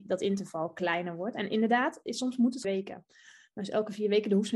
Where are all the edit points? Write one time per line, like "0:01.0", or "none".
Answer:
0:02.6